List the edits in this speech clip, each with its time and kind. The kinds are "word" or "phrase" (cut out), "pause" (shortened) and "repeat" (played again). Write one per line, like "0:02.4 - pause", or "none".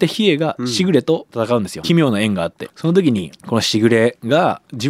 0:01.8 - phrase
0:02.7 - phrase

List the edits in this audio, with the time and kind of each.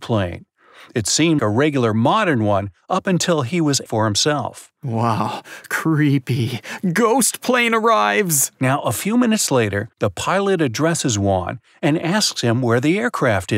0:01.4 - word
0:03.9 - phrase
0:09.9 - pause

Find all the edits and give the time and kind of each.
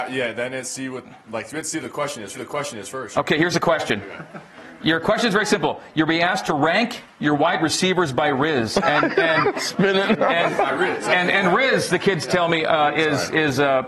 0:02.3 - repeat

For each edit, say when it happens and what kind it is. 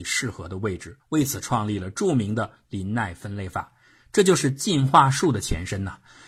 0:01.0 - pause

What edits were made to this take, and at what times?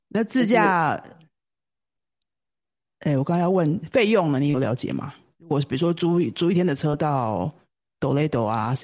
none

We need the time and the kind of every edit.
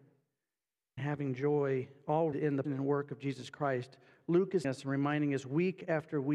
0:01.0 - word
0:02.3 - word
0:02.6 - word
0:04.6 - word

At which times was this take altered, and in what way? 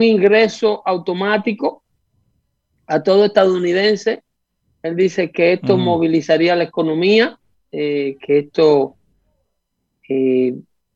none

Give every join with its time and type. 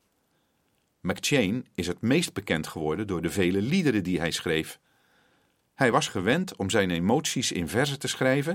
none

